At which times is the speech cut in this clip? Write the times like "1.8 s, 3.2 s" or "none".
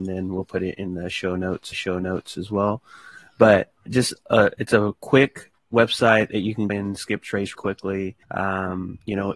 1.7 s, 3.9 s, 5.6 s, 6.7 s, 7.5 s, 8.2 s